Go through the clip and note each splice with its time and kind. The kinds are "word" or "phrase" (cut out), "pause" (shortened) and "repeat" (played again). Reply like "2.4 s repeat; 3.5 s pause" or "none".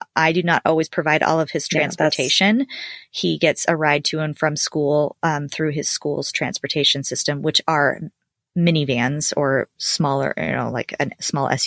none